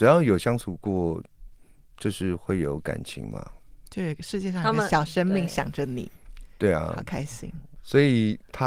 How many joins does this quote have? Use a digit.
0